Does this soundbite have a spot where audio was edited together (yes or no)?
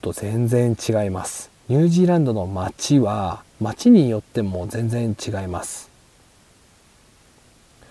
yes